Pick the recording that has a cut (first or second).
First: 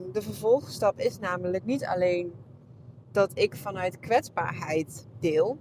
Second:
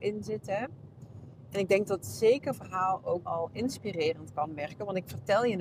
second